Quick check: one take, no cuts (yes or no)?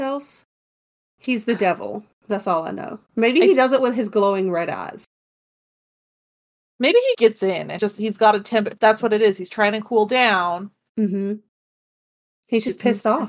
no